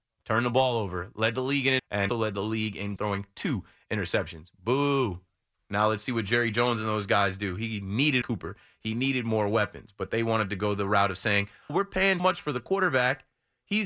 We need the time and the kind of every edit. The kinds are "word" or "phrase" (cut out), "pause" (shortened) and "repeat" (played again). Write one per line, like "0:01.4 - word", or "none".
0:01.8 - word
0:02.1 - word
0:03.0 - word
0:08.2 - word
0:11.7 - word
0:12.2 - word